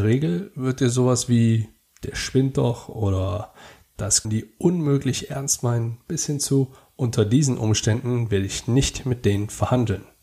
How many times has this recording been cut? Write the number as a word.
one